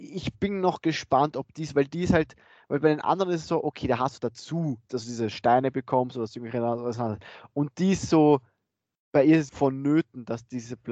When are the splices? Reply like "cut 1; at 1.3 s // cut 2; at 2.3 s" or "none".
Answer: cut 1; at 4.2 s // cut 2; at 9.5 s